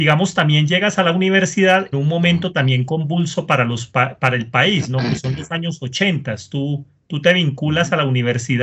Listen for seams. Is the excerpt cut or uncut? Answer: cut